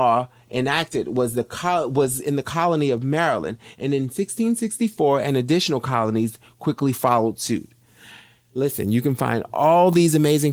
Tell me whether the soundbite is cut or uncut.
uncut